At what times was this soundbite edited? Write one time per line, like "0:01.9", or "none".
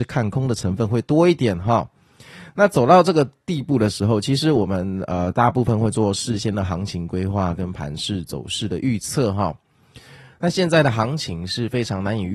none

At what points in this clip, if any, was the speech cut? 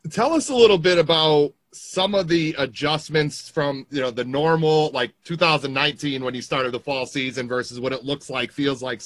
0:01.6

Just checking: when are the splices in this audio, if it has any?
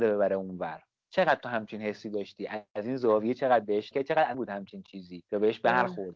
0:01.0
0:03.9
0:04.3

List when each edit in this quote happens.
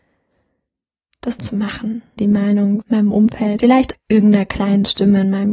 0:01.4
0:02.2
0:02.8
0:03.6
0:03.9

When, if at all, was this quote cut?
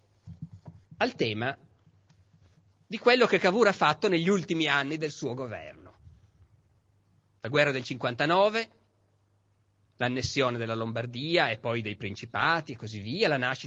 none

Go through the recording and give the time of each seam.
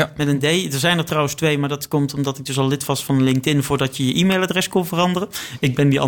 none

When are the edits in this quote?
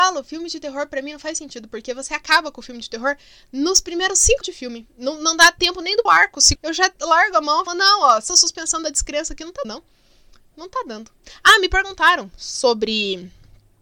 0:04.4
0:06.1
0:06.6
0:07.7
0:08.3
0:09.6

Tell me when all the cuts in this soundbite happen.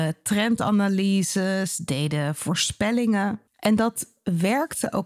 0:03.5

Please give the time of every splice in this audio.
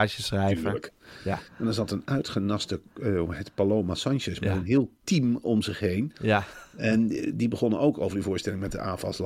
none

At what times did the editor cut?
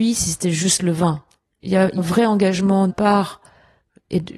0:02.0
0:02.9

